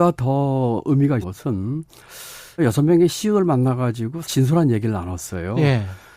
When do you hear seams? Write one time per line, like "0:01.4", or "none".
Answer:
0:01.2
0:02.6
0:04.2